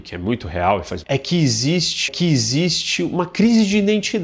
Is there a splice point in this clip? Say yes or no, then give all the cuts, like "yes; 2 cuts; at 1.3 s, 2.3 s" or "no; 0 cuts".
yes; 2 cuts; at 1.0 s, 2.1 s